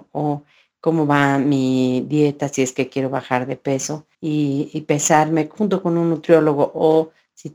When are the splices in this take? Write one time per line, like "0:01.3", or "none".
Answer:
0:04.1